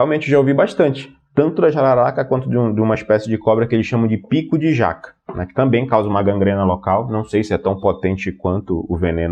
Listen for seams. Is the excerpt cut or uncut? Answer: uncut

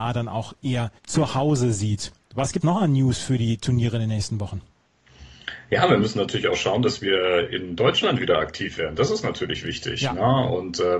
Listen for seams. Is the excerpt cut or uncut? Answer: cut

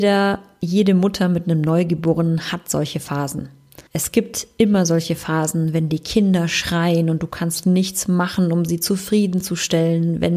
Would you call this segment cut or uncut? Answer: cut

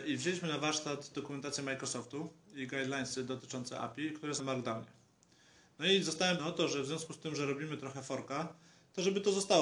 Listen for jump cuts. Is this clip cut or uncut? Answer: cut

